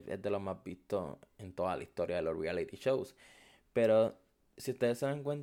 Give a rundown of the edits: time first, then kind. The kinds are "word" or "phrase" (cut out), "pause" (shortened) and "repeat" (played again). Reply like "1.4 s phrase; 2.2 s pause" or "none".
none